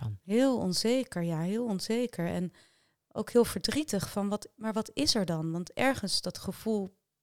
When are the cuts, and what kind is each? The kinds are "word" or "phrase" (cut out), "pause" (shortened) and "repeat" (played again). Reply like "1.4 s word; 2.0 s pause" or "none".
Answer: none